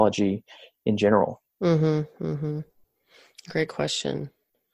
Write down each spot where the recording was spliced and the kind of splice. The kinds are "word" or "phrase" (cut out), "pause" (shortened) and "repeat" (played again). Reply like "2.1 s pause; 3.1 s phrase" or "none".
none